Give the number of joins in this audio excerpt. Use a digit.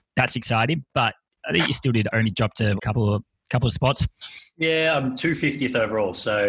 2